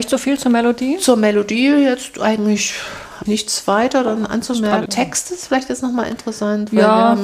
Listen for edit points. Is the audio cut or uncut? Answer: cut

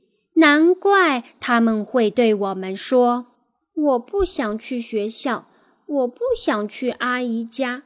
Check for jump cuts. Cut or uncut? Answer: cut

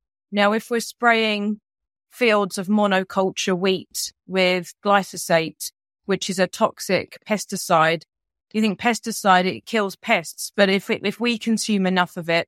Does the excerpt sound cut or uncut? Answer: uncut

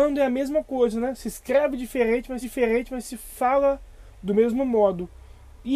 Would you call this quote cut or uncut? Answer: cut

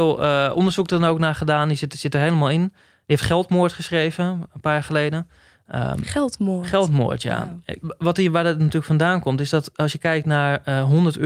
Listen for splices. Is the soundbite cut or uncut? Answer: uncut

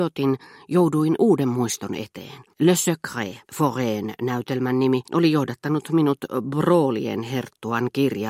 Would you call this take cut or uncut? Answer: cut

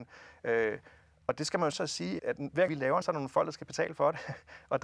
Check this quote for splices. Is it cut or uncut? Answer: cut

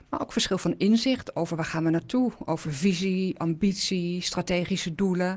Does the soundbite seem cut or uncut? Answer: uncut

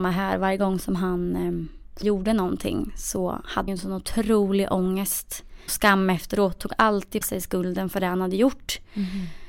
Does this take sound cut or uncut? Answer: cut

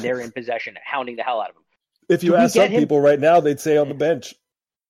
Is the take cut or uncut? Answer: uncut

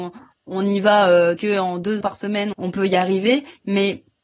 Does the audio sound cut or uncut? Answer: cut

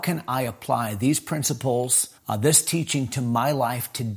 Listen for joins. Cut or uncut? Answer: cut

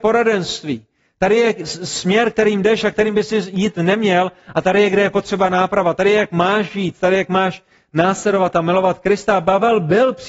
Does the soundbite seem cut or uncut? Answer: uncut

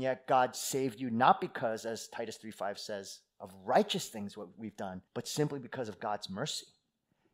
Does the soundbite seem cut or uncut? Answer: cut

